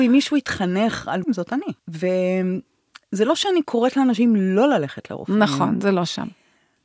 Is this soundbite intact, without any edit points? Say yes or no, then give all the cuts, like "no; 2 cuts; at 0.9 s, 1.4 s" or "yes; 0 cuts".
no; 2 cuts; at 1.2 s, 1.8 s